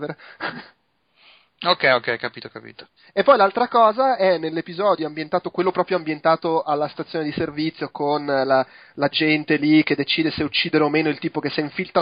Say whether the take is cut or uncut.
uncut